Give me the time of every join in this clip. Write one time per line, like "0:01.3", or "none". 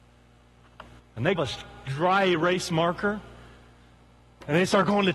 0:01.0
0:01.4